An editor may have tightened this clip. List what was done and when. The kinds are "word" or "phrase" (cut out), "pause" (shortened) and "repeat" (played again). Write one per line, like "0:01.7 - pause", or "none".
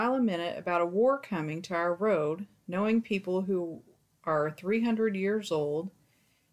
none